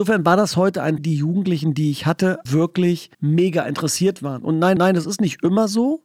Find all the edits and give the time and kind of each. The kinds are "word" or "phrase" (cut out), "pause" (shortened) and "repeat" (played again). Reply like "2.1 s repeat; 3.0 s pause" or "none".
1.0 s phrase; 2.5 s word; 3.1 s pause; 4.8 s repeat